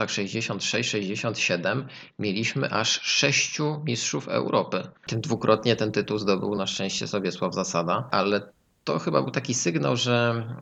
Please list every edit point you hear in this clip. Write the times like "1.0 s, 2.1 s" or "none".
none